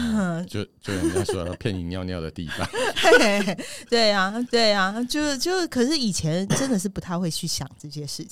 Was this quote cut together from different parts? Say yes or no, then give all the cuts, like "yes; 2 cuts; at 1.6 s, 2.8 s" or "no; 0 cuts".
yes; 1 cut; at 4.5 s